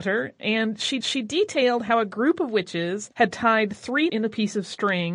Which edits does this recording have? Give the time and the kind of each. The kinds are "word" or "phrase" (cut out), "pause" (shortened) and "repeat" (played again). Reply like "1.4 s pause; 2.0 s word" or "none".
1.0 s repeat; 3.1 s pause; 4.1 s word